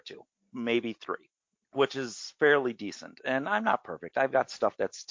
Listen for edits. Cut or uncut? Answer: uncut